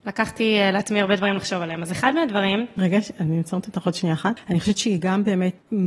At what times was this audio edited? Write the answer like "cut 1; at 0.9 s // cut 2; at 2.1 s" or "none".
none

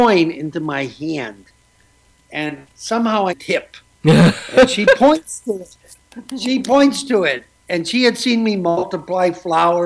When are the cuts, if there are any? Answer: cut 1; at 3.3 s

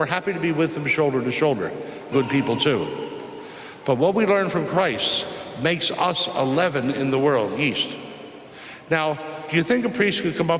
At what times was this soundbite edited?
cut 1; at 2.1 s

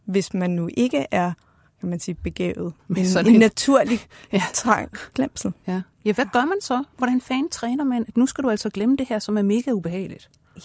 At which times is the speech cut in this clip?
cut 1; at 2.8 s // cut 2; at 5.1 s // cut 3; at 5.6 s

